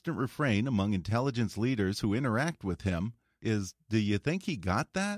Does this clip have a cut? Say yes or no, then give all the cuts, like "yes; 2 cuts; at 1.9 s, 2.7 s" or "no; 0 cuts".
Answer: no; 0 cuts